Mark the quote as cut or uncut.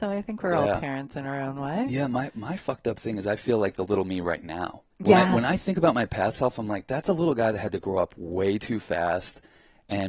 cut